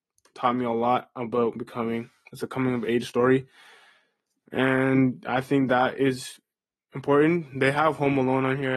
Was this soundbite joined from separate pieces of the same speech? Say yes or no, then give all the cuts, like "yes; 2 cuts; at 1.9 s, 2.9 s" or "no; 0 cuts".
no; 0 cuts